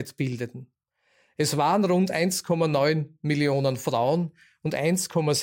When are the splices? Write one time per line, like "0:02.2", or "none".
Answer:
none